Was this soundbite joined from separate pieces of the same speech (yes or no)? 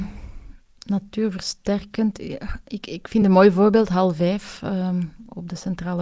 no